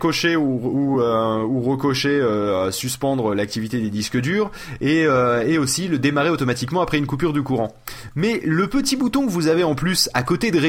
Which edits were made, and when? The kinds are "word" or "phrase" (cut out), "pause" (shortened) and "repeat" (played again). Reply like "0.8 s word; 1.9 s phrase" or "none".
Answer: none